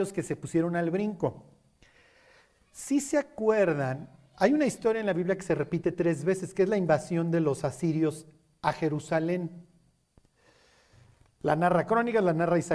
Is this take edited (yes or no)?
no